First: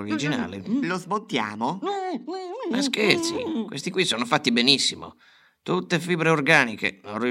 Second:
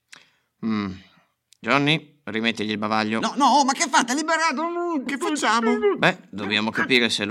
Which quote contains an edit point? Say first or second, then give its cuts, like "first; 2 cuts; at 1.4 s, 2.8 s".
second; 1 cut; at 5.1 s